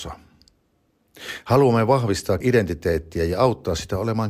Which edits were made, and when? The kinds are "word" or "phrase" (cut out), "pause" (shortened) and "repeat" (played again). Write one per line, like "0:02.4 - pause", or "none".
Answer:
0:02.4 - word